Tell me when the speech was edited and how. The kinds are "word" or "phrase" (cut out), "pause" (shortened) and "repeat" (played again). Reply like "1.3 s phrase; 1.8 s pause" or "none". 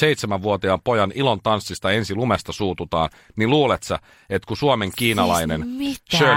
none